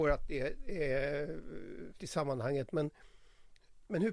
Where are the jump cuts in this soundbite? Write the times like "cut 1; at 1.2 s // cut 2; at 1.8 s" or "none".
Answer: cut 1; at 2.0 s